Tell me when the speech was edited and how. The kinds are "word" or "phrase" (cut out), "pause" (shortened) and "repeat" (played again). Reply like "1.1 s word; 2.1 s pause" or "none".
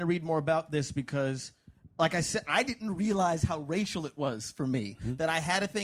none